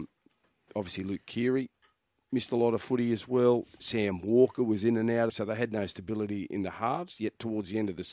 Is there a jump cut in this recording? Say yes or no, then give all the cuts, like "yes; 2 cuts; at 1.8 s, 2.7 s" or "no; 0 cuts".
yes; 1 cut; at 5.3 s